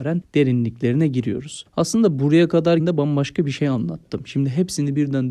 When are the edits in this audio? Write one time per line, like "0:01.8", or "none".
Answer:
0:02.8